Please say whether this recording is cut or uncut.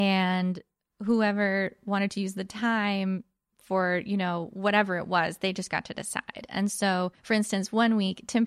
cut